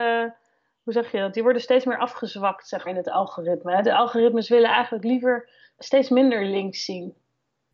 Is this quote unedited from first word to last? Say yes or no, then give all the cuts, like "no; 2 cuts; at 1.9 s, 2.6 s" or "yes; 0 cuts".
no; 2 cuts; at 2.9 s, 5.8 s